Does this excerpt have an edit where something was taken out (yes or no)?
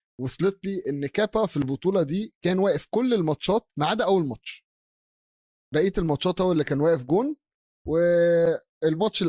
no